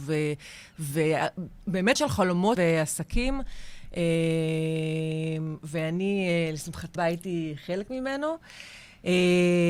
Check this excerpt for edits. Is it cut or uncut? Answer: cut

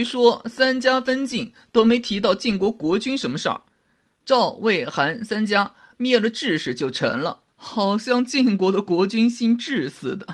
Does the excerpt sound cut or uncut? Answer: uncut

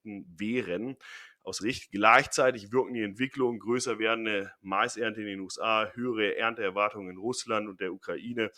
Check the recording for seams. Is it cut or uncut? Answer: cut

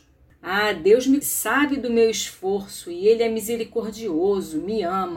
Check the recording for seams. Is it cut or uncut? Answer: cut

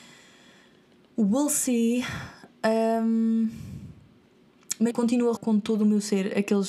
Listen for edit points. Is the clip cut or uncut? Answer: cut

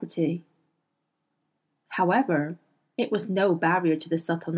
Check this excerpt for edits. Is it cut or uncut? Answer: uncut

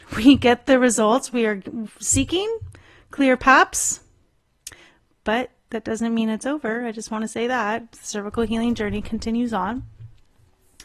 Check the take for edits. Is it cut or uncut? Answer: uncut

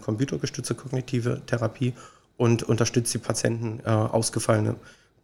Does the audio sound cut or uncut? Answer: uncut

